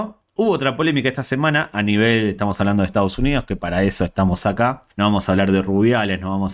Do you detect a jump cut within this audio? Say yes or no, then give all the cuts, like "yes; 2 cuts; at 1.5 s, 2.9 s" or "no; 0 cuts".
yes; 1 cut; at 4.9 s